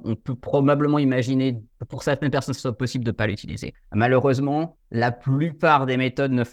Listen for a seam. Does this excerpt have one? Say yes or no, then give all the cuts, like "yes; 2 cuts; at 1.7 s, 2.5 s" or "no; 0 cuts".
no; 0 cuts